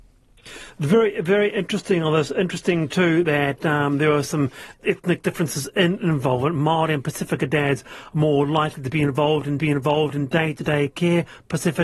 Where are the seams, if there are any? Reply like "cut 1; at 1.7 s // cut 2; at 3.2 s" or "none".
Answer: cut 1; at 4.7 s // cut 2; at 9.6 s